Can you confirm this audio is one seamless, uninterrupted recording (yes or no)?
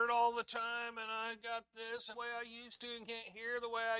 no